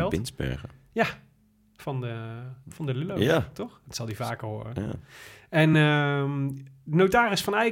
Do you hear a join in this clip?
no; 0 cuts

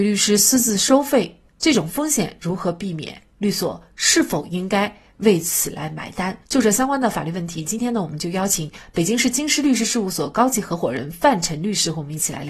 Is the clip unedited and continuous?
no; 2 cuts; at 1.5 s, 6.4 s

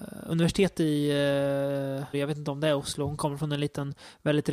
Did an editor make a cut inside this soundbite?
yes; 1 cut; at 2.1 s

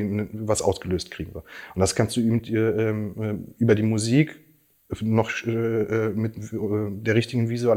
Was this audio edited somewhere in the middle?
no; 0 cuts

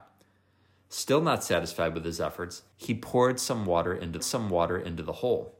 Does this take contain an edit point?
yes; 2 cuts; at 2.7 s, 4.2 s

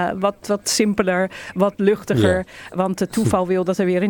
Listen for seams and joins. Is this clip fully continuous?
yes; 0 cuts

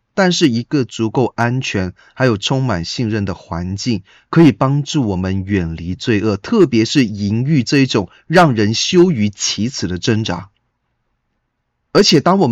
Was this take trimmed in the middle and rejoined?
no; 0 cuts

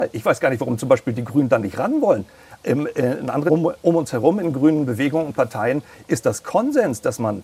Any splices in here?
yes; 1 cut; at 3.5 s

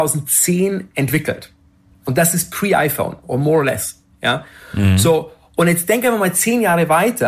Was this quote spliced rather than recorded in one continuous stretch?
no; 0 cuts

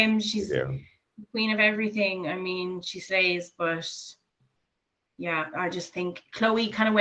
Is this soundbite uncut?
yes; 0 cuts

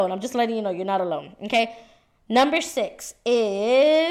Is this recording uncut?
yes; 0 cuts

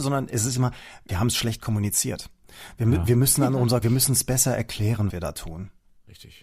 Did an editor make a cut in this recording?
yes; 3 cuts; at 1.1 s, 3.8 s, 5.1 s

